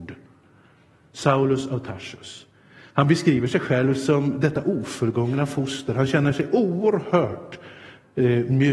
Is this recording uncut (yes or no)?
yes